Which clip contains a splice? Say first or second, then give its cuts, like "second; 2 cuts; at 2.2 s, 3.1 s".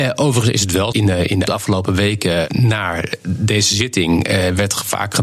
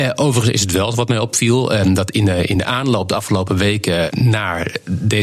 first; 2 cuts; at 0.9 s, 1.5 s